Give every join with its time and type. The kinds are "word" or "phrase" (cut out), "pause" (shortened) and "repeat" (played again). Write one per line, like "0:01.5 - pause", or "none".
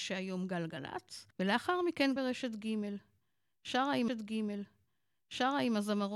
0:01.3 - pause
0:02.2 - word
0:04.1 - repeat